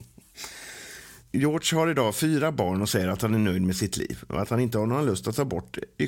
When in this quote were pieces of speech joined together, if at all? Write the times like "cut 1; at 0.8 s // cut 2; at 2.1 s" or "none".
none